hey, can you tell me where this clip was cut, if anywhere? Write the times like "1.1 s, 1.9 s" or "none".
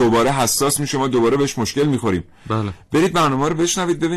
none

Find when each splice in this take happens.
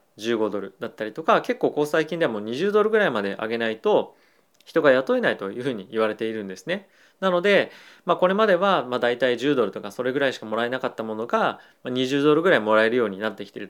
none

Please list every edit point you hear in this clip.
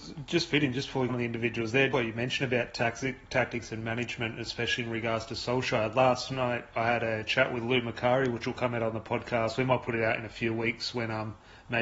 1.1 s, 1.9 s

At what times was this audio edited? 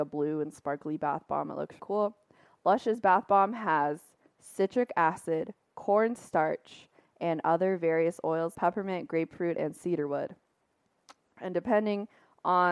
1.8 s, 8.5 s

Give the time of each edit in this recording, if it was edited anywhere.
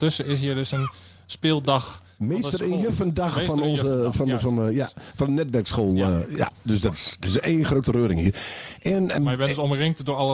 9.2 s

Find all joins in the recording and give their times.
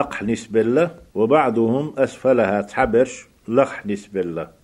1.1 s

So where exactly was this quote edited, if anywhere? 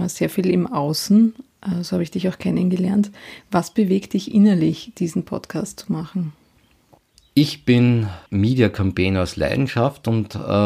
7.0 s, 8.3 s

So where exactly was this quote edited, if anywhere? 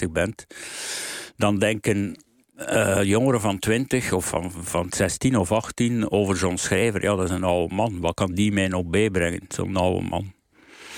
none

